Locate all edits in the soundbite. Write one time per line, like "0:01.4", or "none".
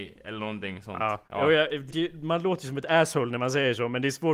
0:01.3
0:01.9